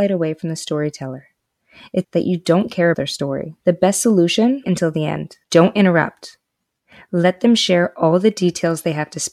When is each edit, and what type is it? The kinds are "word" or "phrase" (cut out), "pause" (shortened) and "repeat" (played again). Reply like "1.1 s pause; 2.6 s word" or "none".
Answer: 2.0 s word; 2.9 s word; 3.6 s pause; 4.6 s phrase; 5.4 s pause